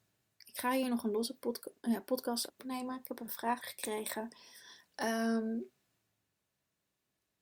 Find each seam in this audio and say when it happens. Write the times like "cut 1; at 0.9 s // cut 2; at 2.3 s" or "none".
cut 1; at 1.8 s // cut 2; at 2.5 s // cut 3; at 3.6 s